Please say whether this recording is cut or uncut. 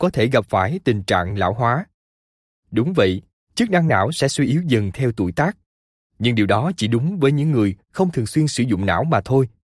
uncut